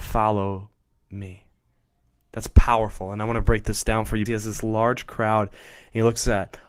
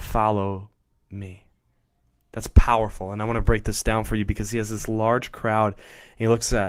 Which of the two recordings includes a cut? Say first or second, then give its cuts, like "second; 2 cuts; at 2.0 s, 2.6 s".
first; 1 cut; at 4.3 s